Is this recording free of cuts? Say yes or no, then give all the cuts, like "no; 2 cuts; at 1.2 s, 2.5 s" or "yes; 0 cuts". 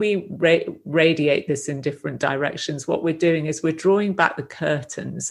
yes; 0 cuts